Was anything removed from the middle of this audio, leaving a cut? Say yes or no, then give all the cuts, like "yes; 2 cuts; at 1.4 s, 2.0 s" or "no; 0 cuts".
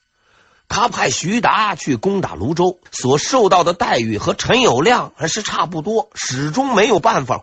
yes; 1 cut; at 2.9 s